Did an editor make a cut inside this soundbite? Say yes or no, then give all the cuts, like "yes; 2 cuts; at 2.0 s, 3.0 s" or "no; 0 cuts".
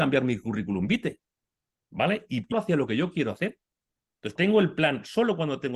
yes; 2 cuts; at 2.5 s, 4.4 s